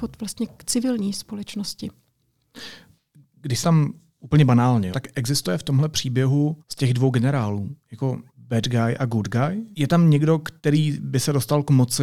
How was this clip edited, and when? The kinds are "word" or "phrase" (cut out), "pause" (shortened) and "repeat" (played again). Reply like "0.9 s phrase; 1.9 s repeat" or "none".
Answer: 3.6 s word; 4.9 s word; 6.6 s pause; 8.3 s pause; 10.6 s pause

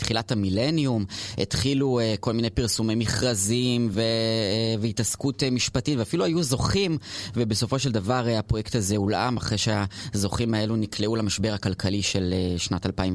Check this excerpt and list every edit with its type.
none

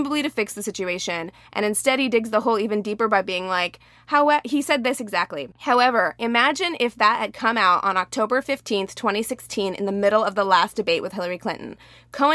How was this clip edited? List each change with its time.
5.5 s pause

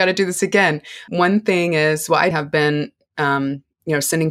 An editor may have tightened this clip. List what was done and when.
1.1 s word; 2.3 s word

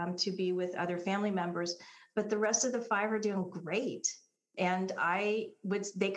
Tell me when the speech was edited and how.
none

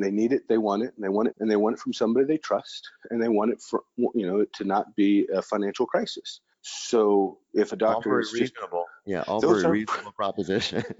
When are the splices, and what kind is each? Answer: 1.3 s word; 4.5 s word; 6.5 s pause

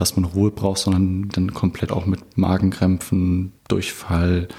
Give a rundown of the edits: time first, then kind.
1.3 s word; 1.9 s word; 3.6 s pause

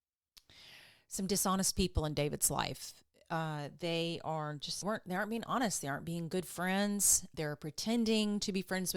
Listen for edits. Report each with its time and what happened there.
4.8 s phrase; 7.3 s word

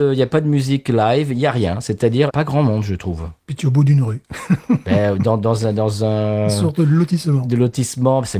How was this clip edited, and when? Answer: 2.3 s phrase

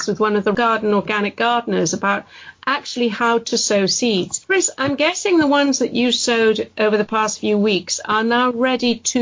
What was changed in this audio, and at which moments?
none

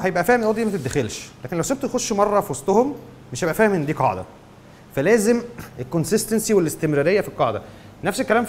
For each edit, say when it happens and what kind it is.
none

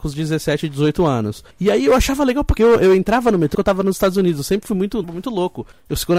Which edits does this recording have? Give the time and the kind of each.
1.5 s pause; 2.6 s phrase; 3.5 s phrase; 5.0 s phrase

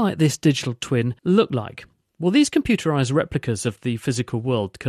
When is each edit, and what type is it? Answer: 1.2 s pause

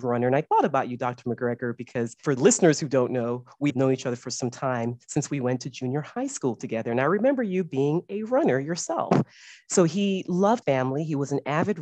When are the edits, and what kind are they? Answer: 2.4 s phrase; 3.7 s word; 10.6 s word

